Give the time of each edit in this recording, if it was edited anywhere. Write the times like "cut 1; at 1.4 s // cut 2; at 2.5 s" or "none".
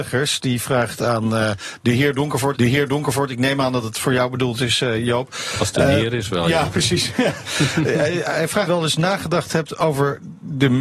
cut 1; at 2.5 s // cut 2; at 8.7 s